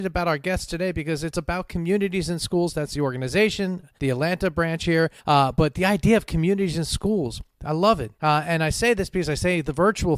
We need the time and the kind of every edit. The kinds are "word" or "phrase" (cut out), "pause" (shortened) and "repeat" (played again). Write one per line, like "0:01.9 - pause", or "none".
0:04.0 - pause
0:05.2 - pause
0:07.5 - pause
0:08.1 - pause